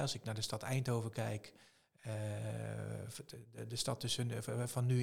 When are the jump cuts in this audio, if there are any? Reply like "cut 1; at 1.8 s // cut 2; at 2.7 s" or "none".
none